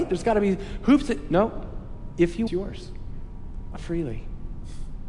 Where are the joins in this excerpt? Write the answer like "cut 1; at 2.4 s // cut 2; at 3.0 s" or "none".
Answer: cut 1; at 2.5 s // cut 2; at 3.8 s

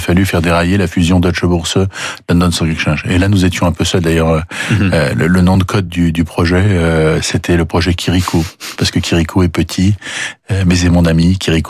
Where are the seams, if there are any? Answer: none

